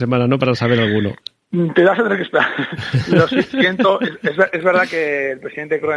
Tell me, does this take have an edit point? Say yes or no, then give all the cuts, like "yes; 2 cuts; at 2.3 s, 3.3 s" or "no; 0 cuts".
no; 0 cuts